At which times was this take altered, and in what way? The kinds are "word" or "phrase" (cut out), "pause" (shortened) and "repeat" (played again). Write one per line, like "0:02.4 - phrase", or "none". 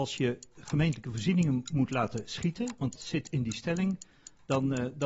0:02.9 - word